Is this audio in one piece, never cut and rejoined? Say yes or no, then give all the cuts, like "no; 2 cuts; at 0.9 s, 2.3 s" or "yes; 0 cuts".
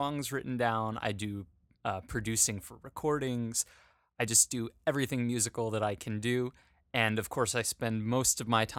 yes; 0 cuts